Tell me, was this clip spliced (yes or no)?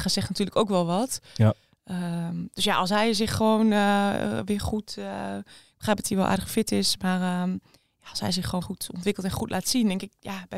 yes